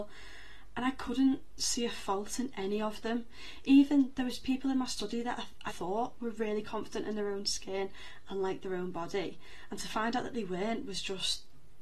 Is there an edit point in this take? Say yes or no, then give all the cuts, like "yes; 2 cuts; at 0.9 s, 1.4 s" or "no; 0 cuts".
yes; 1 cut; at 5.7 s